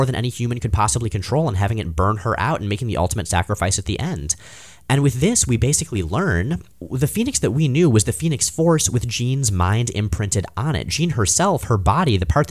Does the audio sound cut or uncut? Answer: uncut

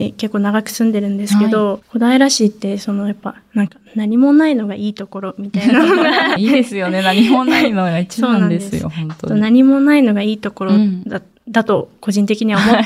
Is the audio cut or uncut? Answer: cut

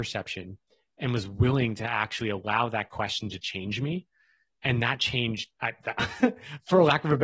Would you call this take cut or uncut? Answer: uncut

